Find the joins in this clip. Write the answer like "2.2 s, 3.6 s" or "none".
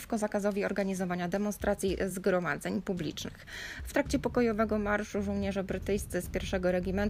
none

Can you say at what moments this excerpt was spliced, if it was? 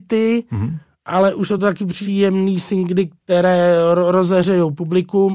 none

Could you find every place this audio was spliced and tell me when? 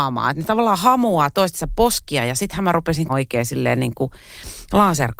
3.1 s

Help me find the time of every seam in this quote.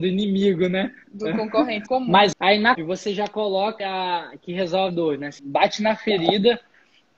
1.9 s, 2.3 s, 2.7 s, 3.8 s, 4.9 s, 5.4 s

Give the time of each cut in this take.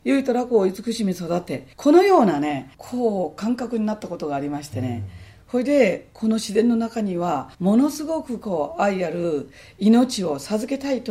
1.7 s, 2.7 s, 7.5 s

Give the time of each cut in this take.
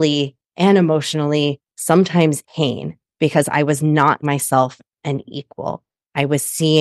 2.4 s, 4.2 s, 4.8 s

